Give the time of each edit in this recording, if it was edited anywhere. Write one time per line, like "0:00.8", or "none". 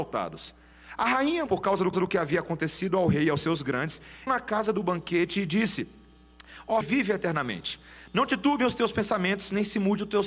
0:01.5
0:01.9
0:04.3
0:06.8